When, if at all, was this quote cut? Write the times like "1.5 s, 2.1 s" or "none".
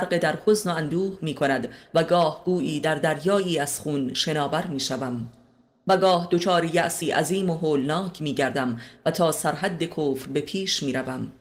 none